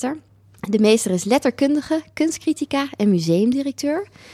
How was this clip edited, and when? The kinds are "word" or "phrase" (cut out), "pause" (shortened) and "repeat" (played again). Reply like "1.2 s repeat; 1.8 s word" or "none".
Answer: none